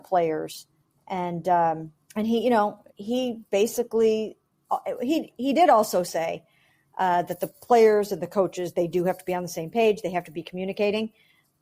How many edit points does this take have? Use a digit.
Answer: 2